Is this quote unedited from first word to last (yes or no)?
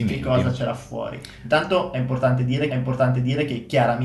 no